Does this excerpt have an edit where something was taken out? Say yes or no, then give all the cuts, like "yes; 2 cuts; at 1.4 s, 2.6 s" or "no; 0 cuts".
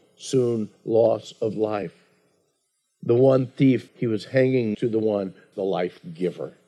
yes; 3 cuts; at 3.9 s, 4.7 s, 5.5 s